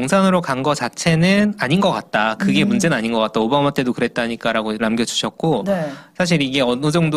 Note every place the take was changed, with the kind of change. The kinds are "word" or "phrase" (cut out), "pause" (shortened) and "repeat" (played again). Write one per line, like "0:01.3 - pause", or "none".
0:04.8 - word